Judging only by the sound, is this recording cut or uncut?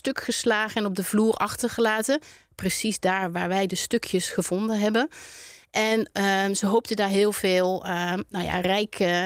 uncut